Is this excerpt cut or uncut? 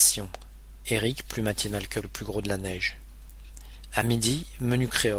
cut